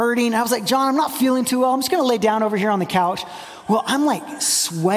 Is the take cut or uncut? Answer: uncut